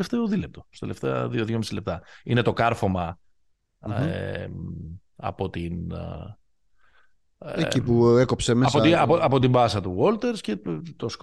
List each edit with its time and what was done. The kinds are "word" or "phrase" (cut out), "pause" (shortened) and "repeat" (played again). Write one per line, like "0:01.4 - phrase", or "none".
none